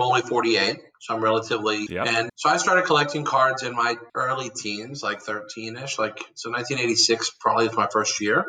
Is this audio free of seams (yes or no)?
no